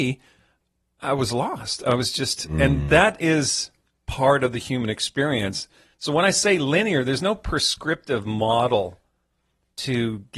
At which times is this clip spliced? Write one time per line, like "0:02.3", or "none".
none